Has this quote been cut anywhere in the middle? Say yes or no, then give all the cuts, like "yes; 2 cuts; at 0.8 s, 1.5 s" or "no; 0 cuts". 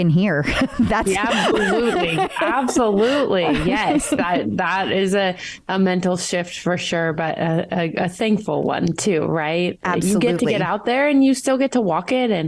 no; 0 cuts